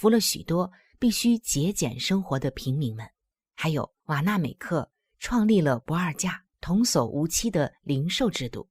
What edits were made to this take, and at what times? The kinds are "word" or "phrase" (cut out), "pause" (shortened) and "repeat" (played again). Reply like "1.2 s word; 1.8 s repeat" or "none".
3.3 s pause; 4.0 s pause; 6.5 s pause